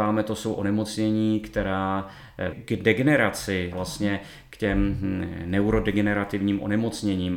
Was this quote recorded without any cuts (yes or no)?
no